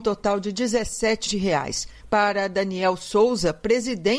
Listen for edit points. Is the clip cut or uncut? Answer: cut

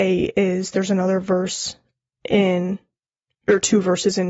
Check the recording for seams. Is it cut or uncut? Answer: uncut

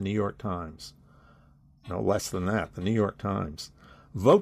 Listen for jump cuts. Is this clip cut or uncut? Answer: uncut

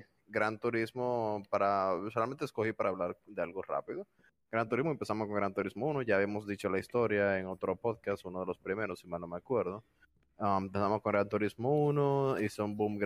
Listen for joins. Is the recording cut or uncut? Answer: uncut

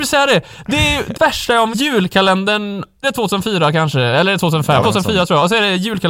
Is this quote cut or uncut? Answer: cut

